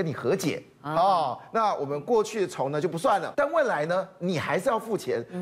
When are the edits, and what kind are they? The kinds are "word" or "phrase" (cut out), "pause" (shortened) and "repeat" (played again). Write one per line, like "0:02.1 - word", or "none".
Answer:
0:03.3 - word